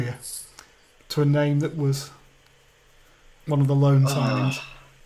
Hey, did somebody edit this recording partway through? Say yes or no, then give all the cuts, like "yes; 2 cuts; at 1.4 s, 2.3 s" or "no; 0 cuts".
no; 0 cuts